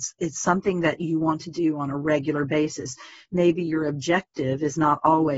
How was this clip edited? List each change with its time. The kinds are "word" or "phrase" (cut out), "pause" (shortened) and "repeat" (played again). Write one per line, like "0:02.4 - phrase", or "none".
none